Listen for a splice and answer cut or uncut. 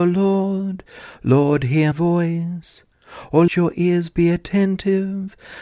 cut